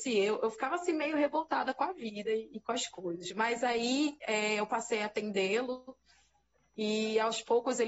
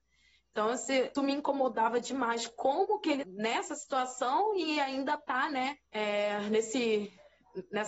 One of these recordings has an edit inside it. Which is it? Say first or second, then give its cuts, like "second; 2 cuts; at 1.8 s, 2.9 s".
second; 3 cuts; at 1.1 s, 3.2 s, 5.9 s